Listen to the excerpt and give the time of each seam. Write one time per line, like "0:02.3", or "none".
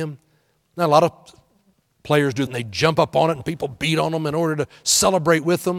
0:02.5